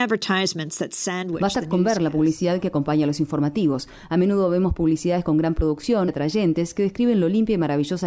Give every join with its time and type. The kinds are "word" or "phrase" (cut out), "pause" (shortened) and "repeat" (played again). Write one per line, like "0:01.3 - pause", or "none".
0:06.1 - word